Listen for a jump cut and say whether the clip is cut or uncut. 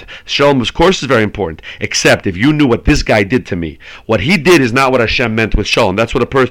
uncut